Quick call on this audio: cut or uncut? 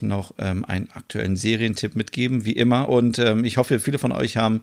uncut